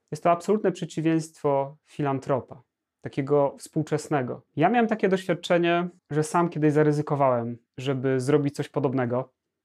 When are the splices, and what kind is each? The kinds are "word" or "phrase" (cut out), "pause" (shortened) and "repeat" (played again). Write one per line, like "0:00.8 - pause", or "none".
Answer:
0:02.8 - pause
0:04.5 - pause
0:06.0 - pause
0:07.7 - pause